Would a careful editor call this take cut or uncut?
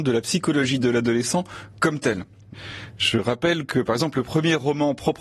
uncut